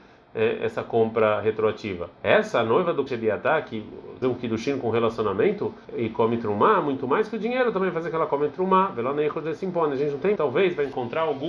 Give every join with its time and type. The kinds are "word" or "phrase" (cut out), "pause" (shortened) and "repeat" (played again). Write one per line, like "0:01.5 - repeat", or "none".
0:02.1 - pause
0:03.1 - word
0:04.2 - phrase
0:05.8 - pause
0:10.4 - phrase